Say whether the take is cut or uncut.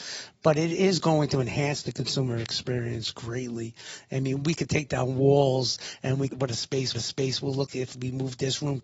cut